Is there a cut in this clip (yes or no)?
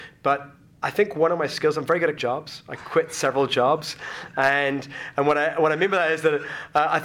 yes